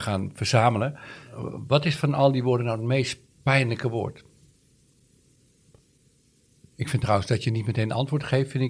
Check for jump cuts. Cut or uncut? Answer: uncut